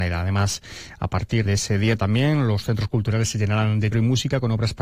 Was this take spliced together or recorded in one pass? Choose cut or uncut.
cut